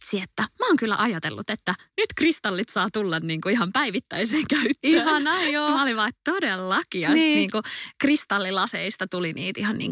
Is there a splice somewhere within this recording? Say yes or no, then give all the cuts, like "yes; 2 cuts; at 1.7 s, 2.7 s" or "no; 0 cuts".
no; 0 cuts